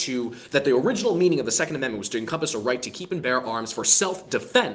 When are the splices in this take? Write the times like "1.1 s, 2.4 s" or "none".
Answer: none

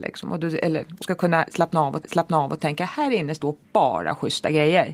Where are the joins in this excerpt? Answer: 1.0 s, 2.0 s, 3.6 s

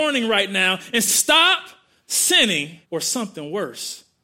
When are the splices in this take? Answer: 1.1 s, 2.8 s

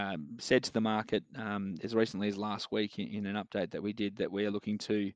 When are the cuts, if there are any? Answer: none

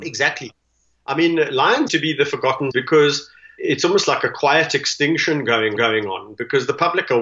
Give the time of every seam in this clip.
1.9 s, 2.7 s, 3.6 s, 5.8 s

